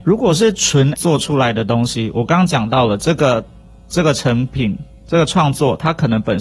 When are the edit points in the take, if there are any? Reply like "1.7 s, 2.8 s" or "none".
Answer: 0.9 s